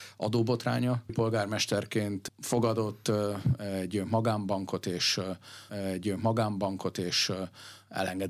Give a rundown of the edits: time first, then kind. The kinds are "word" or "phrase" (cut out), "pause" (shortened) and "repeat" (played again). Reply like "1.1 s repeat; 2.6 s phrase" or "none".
1.1 s word; 5.7 s repeat